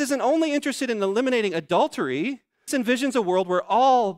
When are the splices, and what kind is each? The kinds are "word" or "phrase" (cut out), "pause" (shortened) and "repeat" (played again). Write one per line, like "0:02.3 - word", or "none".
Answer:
0:02.7 - word